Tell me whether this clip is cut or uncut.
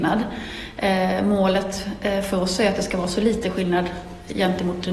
uncut